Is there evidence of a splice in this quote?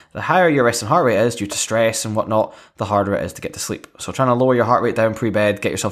no; 0 cuts

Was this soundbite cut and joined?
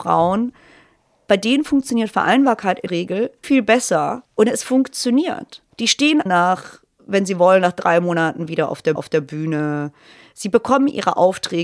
yes; 6 cuts; at 2.9 s, 3.4 s, 4.2 s, 5.7 s, 6.3 s, 9.0 s

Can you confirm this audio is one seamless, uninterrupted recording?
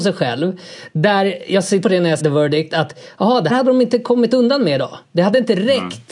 no; 4 cuts; at 1.8 s, 2.2 s, 3.5 s, 5.0 s

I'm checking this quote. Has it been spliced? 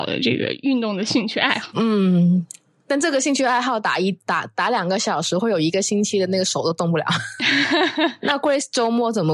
no; 0 cuts

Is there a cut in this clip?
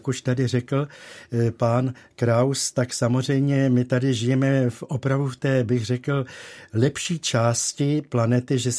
no; 0 cuts

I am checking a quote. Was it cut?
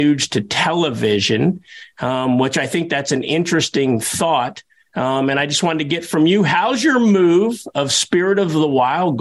no; 0 cuts

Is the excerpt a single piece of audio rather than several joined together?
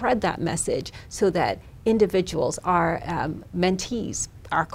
yes; 0 cuts

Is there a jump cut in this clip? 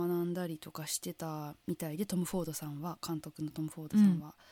yes; 1 cut; at 1.6 s

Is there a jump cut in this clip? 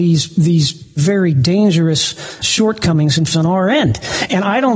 yes; 3 cuts; at 1.0 s, 2.4 s, 3.3 s

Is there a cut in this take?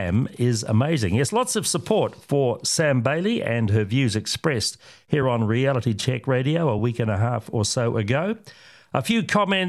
no; 0 cuts

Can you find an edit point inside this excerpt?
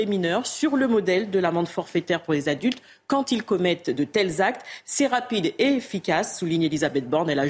no; 0 cuts

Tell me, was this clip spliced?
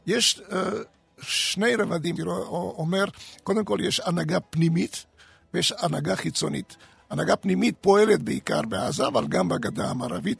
yes; 1 cut; at 2.2 s

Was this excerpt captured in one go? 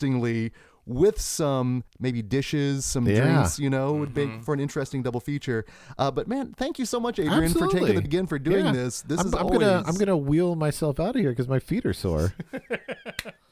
no; 2 cuts; at 1.9 s, 8.0 s

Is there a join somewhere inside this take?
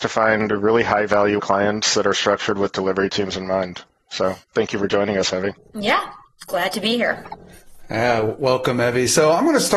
yes; 3 cuts; at 1.4 s, 4.4 s, 5.6 s

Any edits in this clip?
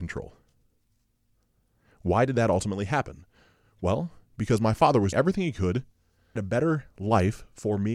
yes; 2 cuts; at 5.1 s, 6.4 s

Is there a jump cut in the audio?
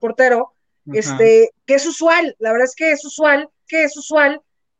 yes; 2 cuts; at 1.7 s, 3.7 s

